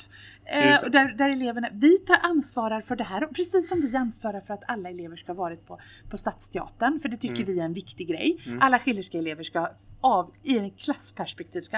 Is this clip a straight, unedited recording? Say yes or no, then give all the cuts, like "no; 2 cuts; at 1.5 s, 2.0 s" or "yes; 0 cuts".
yes; 0 cuts